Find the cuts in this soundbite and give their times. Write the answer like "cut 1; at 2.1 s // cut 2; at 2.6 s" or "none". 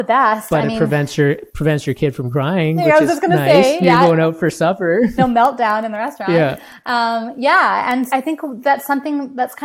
cut 1; at 3.8 s // cut 2; at 5.2 s // cut 3; at 8.1 s